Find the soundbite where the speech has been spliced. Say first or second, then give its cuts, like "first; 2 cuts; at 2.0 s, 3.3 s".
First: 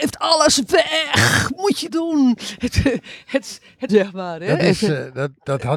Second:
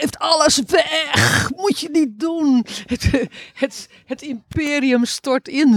first; 2 cuts; at 1.9 s, 3.9 s